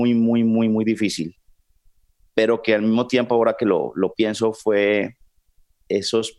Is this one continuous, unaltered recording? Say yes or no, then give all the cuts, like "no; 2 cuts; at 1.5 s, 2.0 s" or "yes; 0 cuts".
yes; 0 cuts